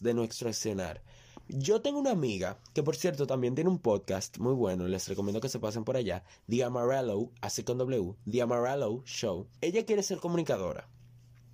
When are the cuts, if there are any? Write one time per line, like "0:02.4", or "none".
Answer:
0:09.6